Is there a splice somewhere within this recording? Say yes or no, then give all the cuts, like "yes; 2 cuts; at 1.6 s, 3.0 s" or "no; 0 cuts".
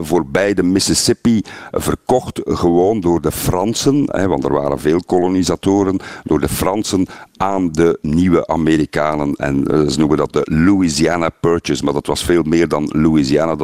no; 0 cuts